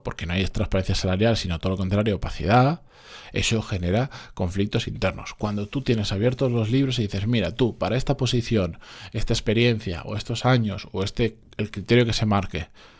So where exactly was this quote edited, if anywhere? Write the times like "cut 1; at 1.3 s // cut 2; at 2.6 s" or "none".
none